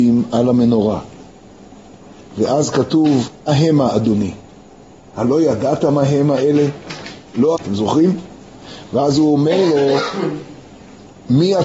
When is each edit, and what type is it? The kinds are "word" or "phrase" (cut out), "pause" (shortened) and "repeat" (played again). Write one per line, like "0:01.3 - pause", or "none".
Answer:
0:03.5 - word
0:07.6 - word